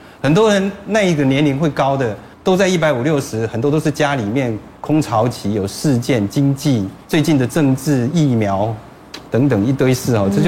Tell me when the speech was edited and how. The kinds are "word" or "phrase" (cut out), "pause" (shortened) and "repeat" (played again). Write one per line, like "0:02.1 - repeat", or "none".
0:02.3 - pause
0:04.8 - pause
0:07.0 - pause